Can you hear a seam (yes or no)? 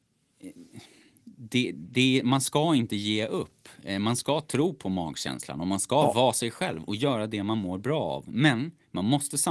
no